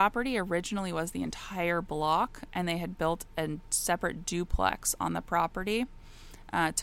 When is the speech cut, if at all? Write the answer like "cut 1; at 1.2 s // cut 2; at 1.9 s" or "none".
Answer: none

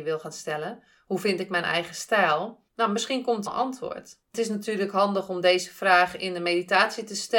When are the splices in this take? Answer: cut 1; at 2.7 s // cut 2; at 3.5 s // cut 3; at 4.2 s

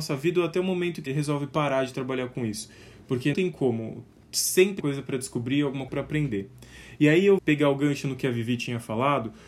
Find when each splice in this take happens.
cut 1; at 1.1 s // cut 2; at 3.3 s // cut 3; at 4.8 s // cut 4; at 5.9 s // cut 5; at 7.4 s

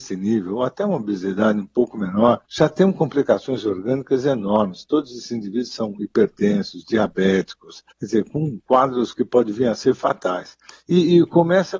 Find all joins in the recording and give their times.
cut 1; at 2.5 s // cut 2; at 7.9 s // cut 3; at 10.7 s

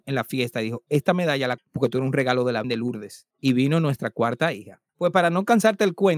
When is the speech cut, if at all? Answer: cut 1; at 1.6 s // cut 2; at 2.6 s // cut 3; at 3.3 s // cut 4; at 4.9 s

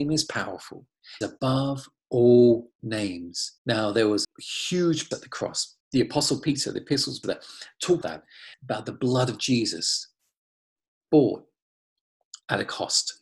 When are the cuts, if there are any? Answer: cut 1; at 1.2 s // cut 2; at 3.6 s // cut 3; at 4.2 s // cut 4; at 5.1 s // cut 5; at 5.8 s // cut 6; at 7.2 s // cut 7; at 8.0 s // cut 8; at 8.5 s

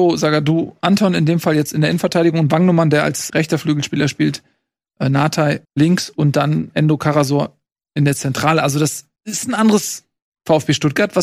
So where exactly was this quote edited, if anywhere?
cut 1; at 3.3 s // cut 2; at 5.6 s // cut 3; at 9.2 s

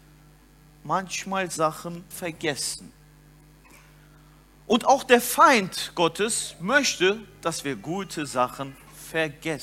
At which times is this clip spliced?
cut 1; at 2.1 s

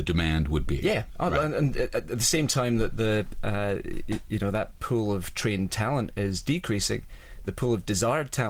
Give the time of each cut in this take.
none

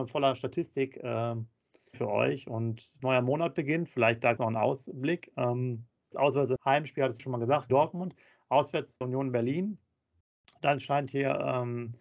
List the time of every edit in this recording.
cut 1; at 1.9 s // cut 2; at 3.0 s // cut 3; at 4.4 s // cut 4; at 6.1 s // cut 5; at 6.6 s // cut 6; at 7.2 s // cut 7; at 7.7 s // cut 8; at 9.0 s

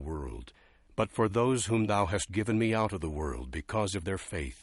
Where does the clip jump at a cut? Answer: none

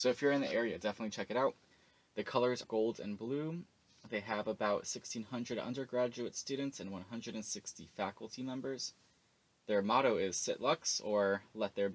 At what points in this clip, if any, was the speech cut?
cut 1; at 2.6 s

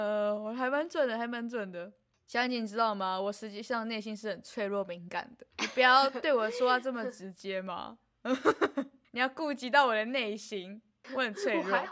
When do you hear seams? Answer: cut 1; at 5.5 s

